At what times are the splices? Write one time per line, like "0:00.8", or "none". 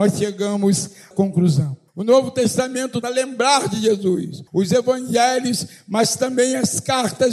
0:01.1
0:01.9
0:03.0
0:04.5